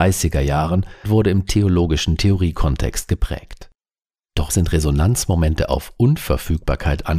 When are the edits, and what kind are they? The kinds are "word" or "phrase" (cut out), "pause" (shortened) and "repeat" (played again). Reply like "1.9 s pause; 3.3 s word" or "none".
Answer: 1.0 s word; 4.5 s word